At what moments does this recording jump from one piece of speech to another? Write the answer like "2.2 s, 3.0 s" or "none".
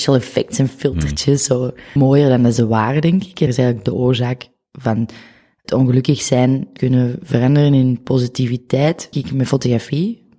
2.0 s, 3.5 s, 5.6 s, 6.8 s, 9.1 s

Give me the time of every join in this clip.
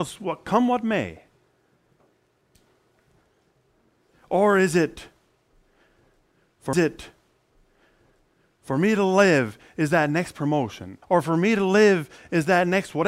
6.7 s, 11.0 s

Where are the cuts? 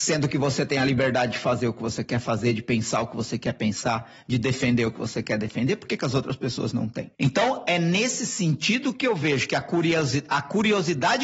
7.1 s

